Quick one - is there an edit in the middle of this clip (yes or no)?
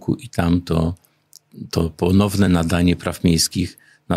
no